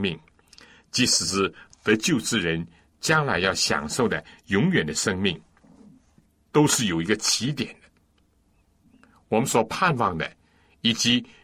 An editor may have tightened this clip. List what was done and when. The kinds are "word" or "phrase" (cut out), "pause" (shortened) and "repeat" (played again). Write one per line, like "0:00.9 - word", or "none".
none